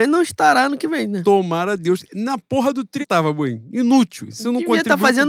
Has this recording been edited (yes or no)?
yes